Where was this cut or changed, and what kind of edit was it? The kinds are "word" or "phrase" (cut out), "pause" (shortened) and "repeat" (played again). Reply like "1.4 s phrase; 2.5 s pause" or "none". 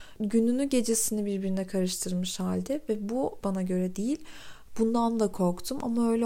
3.4 s phrase